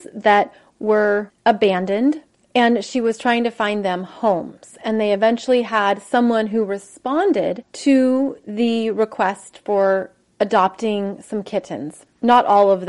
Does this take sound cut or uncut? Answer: uncut